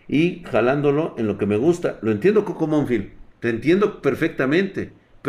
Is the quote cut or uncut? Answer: cut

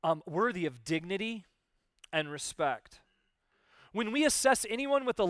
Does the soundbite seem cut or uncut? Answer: uncut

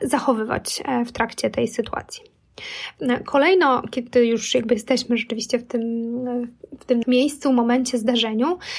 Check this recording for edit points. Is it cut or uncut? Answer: cut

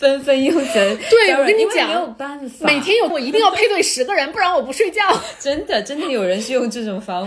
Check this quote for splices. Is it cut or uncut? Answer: cut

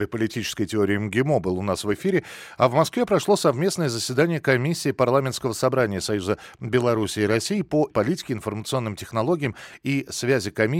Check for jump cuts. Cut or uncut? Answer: cut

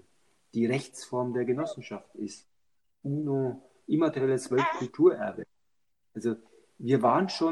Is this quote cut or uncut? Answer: uncut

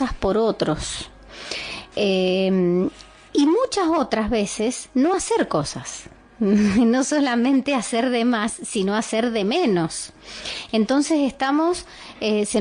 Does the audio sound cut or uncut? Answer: uncut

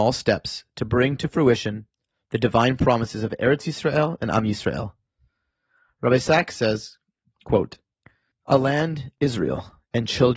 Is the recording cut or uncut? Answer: uncut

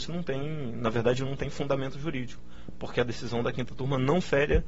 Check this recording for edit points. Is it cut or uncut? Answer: uncut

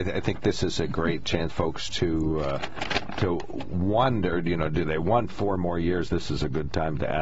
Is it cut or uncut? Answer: cut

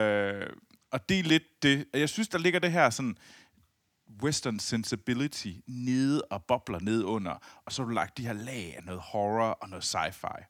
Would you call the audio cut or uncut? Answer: uncut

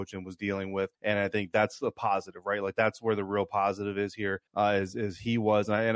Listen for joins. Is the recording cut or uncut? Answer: cut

